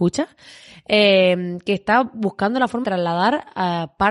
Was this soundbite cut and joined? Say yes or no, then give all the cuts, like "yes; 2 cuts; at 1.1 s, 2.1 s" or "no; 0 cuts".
yes; 1 cut; at 2.8 s